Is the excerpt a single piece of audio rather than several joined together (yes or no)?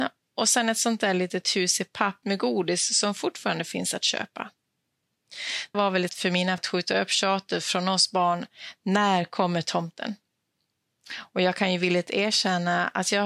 no